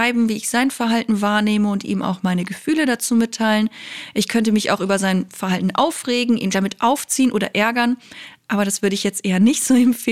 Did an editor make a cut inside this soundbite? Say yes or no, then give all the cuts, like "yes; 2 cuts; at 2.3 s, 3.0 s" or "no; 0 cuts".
yes; 1 cut; at 6.5 s